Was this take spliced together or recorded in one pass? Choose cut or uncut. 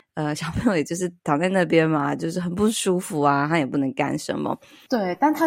cut